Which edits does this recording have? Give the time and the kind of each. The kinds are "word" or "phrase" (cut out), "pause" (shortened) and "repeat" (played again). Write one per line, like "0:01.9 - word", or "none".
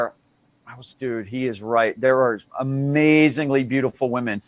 0:00.9 - word
0:02.5 - pause